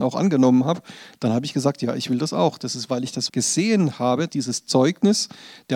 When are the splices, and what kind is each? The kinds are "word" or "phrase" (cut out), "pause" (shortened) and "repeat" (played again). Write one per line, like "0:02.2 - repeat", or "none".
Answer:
0:03.3 - word
0:04.3 - word